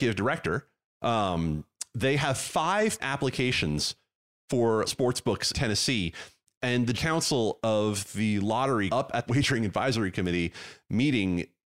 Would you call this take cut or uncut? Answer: cut